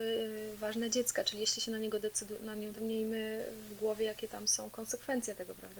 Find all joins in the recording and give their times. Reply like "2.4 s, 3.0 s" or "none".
2.7 s